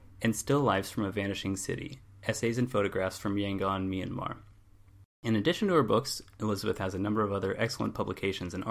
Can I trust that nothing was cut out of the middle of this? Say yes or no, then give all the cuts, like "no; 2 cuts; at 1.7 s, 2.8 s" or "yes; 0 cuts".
yes; 0 cuts